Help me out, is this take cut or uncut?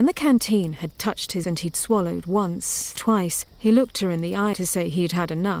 cut